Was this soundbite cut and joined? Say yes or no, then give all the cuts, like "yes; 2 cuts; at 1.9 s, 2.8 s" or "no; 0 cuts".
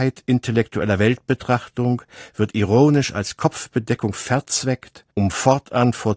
yes; 1 cut; at 5.1 s